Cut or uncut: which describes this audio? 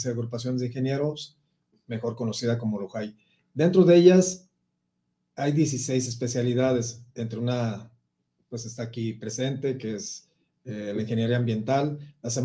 uncut